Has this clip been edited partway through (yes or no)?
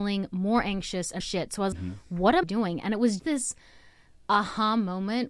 yes